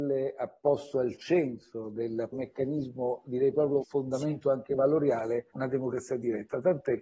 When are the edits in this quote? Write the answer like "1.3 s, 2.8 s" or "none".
2.3 s, 3.8 s, 5.5 s